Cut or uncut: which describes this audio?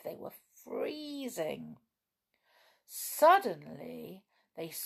uncut